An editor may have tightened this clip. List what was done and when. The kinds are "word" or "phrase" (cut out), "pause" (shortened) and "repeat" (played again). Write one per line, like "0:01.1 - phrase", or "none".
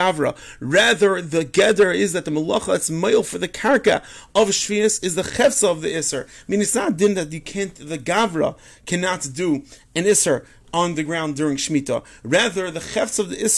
none

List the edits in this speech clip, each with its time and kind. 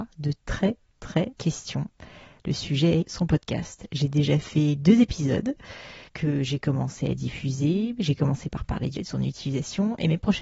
0:01.3 - word
0:03.0 - phrase
0:06.1 - pause
0:09.0 - word

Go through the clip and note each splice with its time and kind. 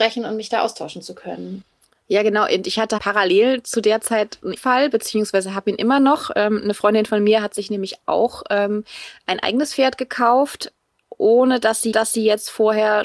0:03.0 - word
0:04.6 - word
0:11.9 - repeat

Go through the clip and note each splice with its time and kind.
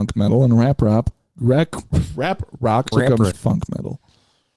0:02.9 - word
0:03.3 - word

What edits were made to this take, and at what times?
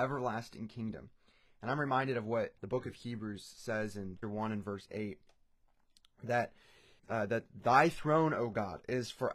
0:02.6 - pause
0:04.2 - word
0:07.0 - pause

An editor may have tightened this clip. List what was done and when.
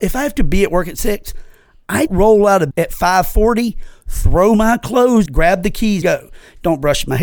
0:02.1 - word
0:02.7 - word
0:05.3 - word
0:06.0 - word

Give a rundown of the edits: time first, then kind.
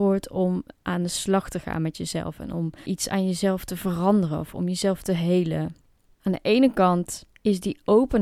none

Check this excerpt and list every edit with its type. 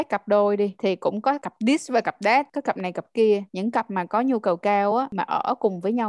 none

